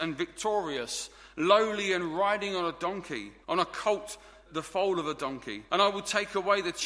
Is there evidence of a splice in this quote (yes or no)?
yes